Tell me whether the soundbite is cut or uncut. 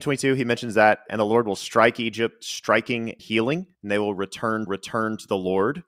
cut